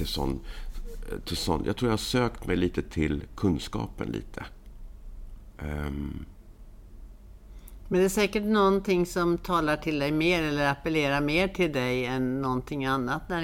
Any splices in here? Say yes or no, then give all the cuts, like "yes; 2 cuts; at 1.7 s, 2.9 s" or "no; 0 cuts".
no; 0 cuts